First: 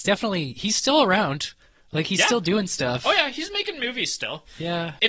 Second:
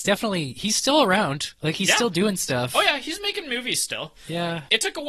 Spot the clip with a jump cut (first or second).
second